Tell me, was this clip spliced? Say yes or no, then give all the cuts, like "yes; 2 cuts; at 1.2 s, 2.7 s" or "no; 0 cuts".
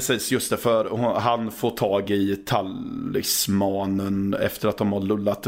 no; 0 cuts